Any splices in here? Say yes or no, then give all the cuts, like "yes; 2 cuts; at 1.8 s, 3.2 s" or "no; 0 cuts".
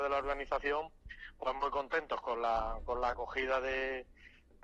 no; 0 cuts